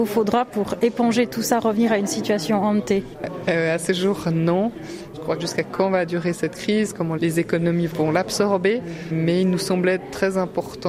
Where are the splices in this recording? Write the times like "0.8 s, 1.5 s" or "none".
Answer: 5.4 s